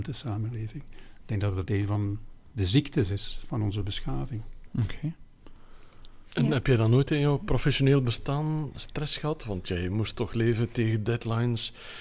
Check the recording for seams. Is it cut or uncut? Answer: uncut